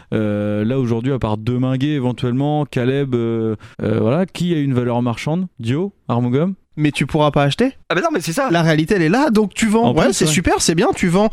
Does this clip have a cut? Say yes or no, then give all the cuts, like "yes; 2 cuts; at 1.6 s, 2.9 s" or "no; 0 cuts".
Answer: yes; 4 cuts; at 3.7 s, 5.5 s, 6.6 s, 7.8 s